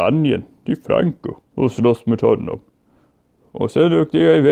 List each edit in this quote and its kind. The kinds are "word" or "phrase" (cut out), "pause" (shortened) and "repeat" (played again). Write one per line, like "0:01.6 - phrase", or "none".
0:01.4 - pause